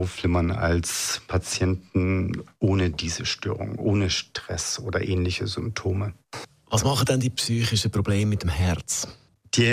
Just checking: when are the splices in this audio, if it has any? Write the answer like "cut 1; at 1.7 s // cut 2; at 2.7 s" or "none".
none